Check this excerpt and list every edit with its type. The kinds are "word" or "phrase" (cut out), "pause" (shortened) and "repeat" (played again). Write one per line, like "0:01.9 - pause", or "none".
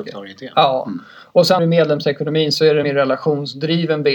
0:01.6 - word
0:02.8 - word